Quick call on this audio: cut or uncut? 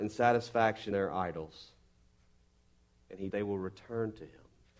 cut